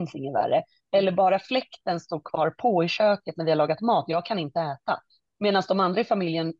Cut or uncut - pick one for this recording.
uncut